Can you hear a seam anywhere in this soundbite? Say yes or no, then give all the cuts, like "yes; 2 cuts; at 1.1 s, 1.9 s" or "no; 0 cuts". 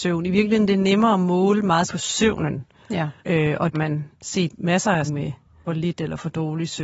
yes; 6 cuts; at 1.9 s, 3.2 s, 3.7 s, 4.1 s, 5.0 s, 5.6 s